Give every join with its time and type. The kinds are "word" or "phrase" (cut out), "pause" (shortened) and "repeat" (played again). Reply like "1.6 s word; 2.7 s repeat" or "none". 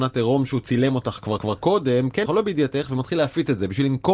1.4 s repeat; 2.3 s word